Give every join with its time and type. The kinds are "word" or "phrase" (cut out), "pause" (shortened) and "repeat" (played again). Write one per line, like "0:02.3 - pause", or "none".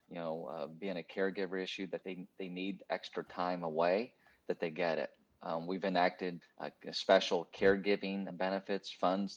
0:02.0 - word
0:06.4 - word
0:08.3 - word

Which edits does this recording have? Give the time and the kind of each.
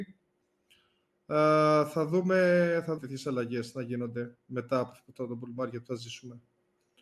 0:03.0 - word

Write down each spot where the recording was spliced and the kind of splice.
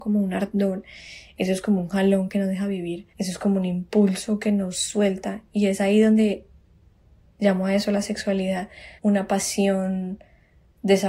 0:03.1 - pause
0:09.0 - pause

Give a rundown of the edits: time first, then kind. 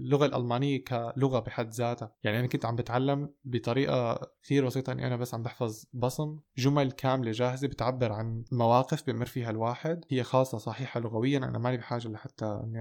0:10.1 - word

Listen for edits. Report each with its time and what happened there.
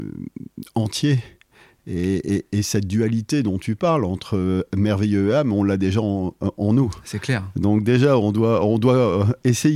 none

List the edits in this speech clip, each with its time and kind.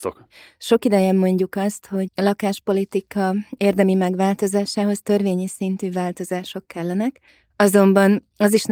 0:02.1 - word
0:07.3 - pause

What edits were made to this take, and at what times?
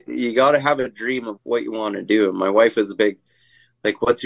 0:01.4 - word

